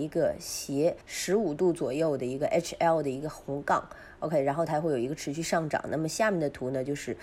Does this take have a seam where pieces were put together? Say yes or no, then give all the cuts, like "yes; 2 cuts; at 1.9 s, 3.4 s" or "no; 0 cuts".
yes; 1 cut; at 1.0 s